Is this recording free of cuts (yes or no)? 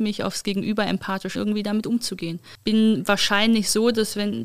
no